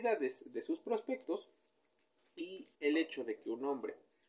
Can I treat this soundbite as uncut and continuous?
no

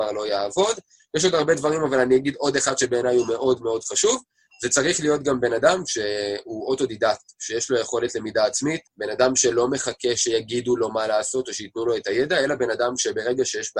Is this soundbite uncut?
no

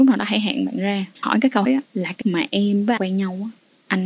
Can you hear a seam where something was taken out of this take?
yes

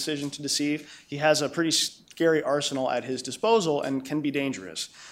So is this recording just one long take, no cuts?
yes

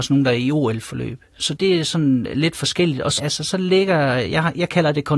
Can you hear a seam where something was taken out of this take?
yes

